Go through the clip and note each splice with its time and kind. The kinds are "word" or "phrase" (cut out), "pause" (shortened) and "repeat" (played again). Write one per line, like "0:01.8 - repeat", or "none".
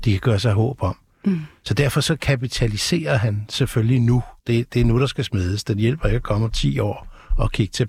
0:04.4 - pause